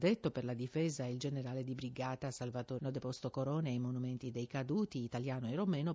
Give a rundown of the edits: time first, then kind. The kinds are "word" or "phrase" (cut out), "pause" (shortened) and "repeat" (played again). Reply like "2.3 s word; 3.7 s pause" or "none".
2.8 s word